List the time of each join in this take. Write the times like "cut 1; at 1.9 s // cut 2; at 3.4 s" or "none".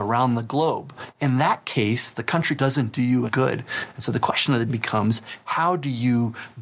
cut 1; at 2.6 s // cut 2; at 3.3 s // cut 3; at 4.7 s